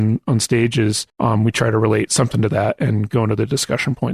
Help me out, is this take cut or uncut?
cut